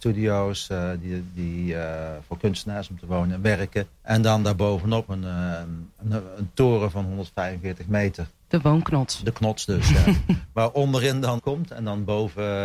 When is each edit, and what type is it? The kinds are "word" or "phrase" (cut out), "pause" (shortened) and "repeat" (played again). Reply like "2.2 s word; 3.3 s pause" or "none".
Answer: 3.9 s pause; 5.1 s word; 11.4 s phrase